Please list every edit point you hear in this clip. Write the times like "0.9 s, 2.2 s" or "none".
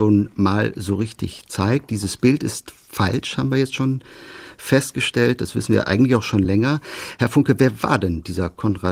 none